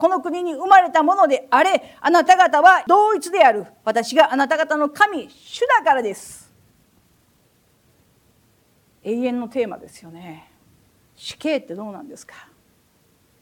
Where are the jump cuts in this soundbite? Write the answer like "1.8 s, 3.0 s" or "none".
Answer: none